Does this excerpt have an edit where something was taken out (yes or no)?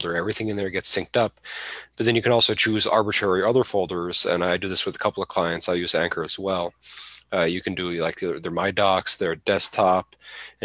no